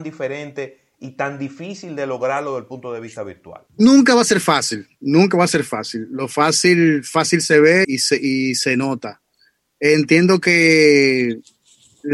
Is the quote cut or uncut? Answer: cut